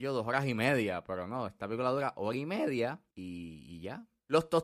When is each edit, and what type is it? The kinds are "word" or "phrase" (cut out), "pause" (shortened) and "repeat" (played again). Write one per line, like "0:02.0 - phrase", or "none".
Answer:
0:03.1 - pause